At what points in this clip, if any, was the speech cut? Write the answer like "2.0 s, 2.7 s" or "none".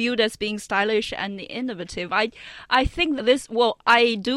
3.2 s